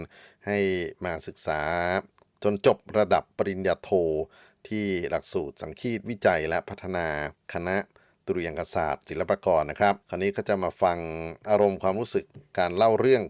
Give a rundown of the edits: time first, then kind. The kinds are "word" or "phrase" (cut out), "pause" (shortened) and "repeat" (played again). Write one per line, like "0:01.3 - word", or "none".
0:07.3 - pause
0:10.0 - pause